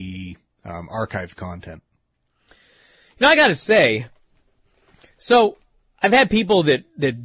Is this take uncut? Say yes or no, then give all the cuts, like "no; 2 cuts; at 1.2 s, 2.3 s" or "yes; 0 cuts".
yes; 0 cuts